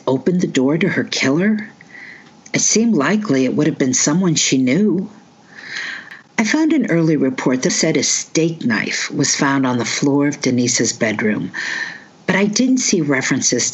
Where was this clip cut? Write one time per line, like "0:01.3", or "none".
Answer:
0:07.7